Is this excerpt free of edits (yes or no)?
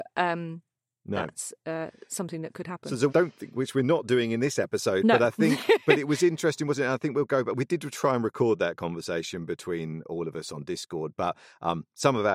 no